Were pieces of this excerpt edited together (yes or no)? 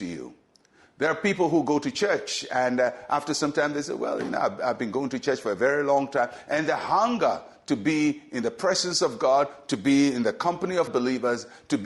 yes